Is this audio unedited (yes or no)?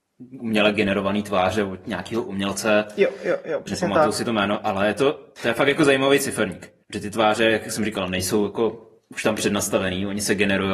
no